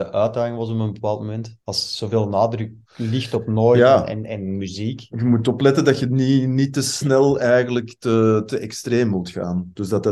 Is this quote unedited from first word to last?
no; 2 cuts; at 1.6 s, 2.8 s

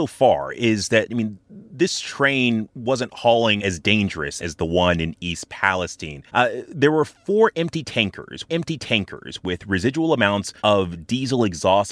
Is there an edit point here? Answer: yes; 6 cuts; at 1.7 s, 3.6 s, 4.4 s, 6.3 s, 8.5 s, 10.6 s

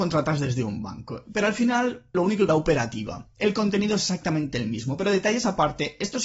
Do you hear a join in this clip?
yes; 2 cuts; at 2.1 s, 2.5 s

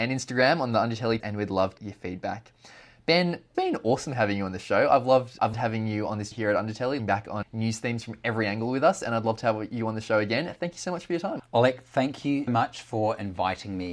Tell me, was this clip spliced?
yes; 8 cuts; at 1.2 s, 1.8 s, 3.5 s, 5.5 s, 6.3 s, 7.0 s, 7.4 s, 12.5 s

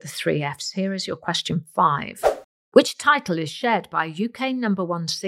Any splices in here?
no; 0 cuts

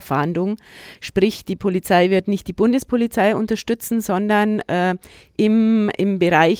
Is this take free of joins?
yes; 0 cuts

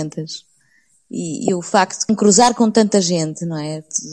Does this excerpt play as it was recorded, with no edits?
no; 1 cut; at 2.1 s

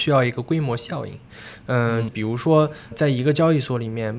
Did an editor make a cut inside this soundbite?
yes; 2 cuts; at 2.1 s, 2.9 s

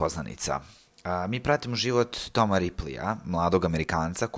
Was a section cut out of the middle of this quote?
no; 0 cuts

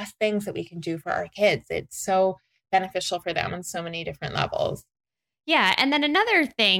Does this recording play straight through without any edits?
yes; 0 cuts

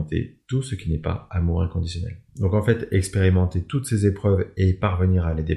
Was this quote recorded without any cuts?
no; 1 cut; at 2.3 s

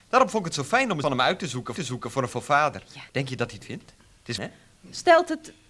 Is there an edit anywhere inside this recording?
yes; 7 cuts; at 1.0 s, 1.8 s, 2.3 s, 3.1 s, 3.6 s, 3.9 s, 4.4 s

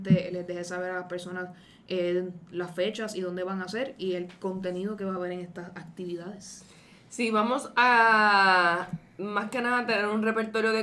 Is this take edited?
no; 0 cuts

